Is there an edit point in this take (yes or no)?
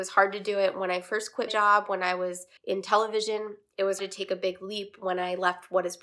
yes